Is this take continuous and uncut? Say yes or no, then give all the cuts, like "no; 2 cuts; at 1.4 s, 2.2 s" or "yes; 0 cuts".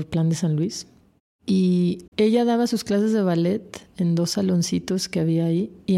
no; 1 cut; at 2.1 s